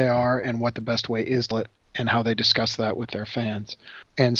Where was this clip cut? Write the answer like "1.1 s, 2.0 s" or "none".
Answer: 1.5 s